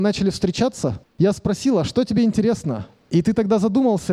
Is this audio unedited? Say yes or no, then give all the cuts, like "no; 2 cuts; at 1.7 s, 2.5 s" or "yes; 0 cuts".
yes; 0 cuts